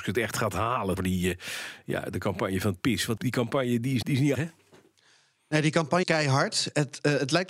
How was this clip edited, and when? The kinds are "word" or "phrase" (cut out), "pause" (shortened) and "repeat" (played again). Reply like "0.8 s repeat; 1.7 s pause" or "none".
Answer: 1.0 s word; 3.2 s word; 4.0 s word; 4.3 s word; 6.0 s word